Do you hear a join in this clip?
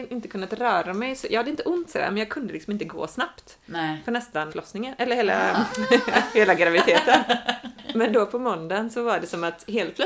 yes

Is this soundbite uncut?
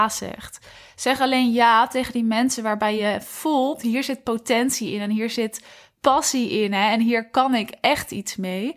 yes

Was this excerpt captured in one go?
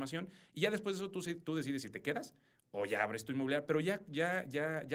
yes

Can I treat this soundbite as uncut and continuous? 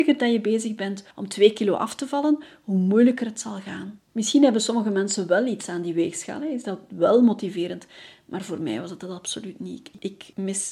no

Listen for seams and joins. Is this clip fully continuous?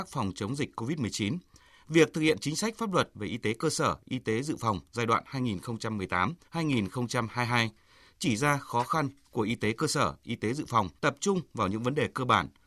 no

